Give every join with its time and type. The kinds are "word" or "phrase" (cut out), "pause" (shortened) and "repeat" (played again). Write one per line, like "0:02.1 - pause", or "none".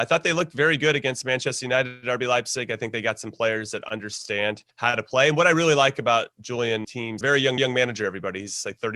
0:04.7 - pause
0:06.8 - word
0:07.2 - phrase
0:07.6 - repeat

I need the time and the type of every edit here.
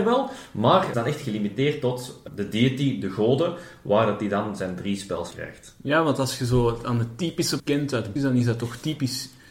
0:00.9 - phrase
0:05.3 - word
0:07.6 - word
0:08.2 - word

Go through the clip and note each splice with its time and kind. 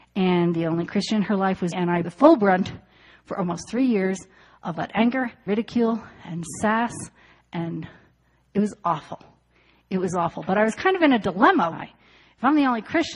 0:01.7 - word
0:02.0 - word
0:04.7 - word
0:05.5 - word
0:11.7 - word

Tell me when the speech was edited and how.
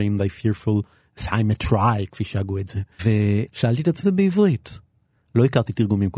0:02.9 - pause
0:04.0 - phrase

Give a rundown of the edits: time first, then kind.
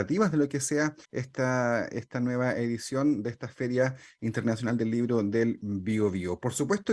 0:01.0 - pause

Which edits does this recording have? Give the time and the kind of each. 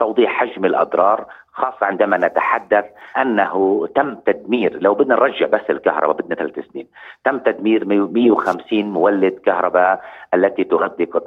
0:03.1 - pause

